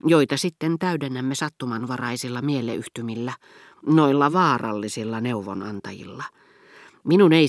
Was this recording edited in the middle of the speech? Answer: no; 0 cuts

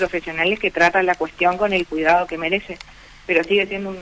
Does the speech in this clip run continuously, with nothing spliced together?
yes; 0 cuts

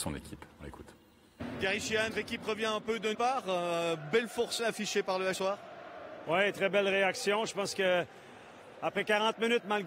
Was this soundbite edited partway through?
yes; 4 cuts; at 2.1 s, 3.1 s, 4.6 s, 5.3 s

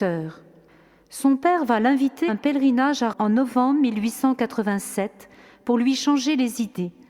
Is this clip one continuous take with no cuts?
no; 2 cuts; at 2.3 s, 3.1 s

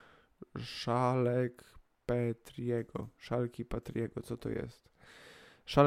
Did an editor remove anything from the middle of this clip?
no; 0 cuts

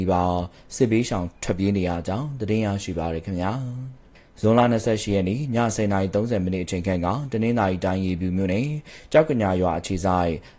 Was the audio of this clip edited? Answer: no; 0 cuts

